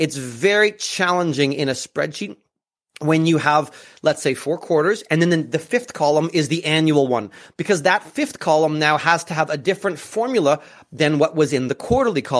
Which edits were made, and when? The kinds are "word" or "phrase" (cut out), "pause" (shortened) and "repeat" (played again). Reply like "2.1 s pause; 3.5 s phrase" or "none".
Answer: none